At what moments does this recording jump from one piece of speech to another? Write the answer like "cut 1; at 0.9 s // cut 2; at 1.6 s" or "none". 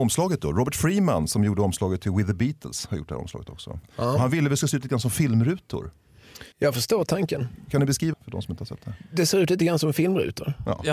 cut 1; at 6.5 s // cut 2; at 8.1 s

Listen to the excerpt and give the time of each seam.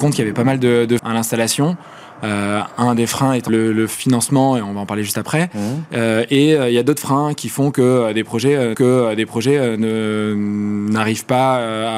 cut 1; at 1.0 s // cut 2; at 3.5 s // cut 3; at 8.7 s

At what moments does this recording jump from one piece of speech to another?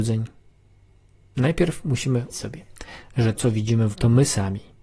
cut 1; at 2.3 s // cut 2; at 3.3 s // cut 3; at 3.9 s

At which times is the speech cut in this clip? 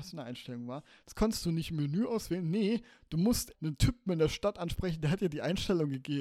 cut 1; at 3.5 s

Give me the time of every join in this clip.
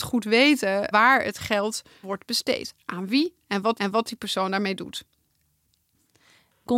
cut 1; at 0.9 s // cut 2; at 2.0 s // cut 3; at 3.8 s

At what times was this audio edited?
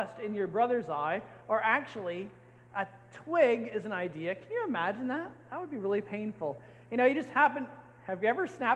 none

